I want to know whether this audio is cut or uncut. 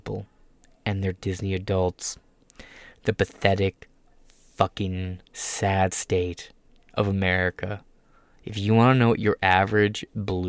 uncut